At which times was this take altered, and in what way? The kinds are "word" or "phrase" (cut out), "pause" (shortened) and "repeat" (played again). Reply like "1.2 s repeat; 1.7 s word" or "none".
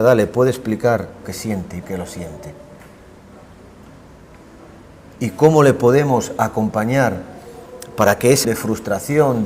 1.2 s word; 1.8 s word; 8.4 s word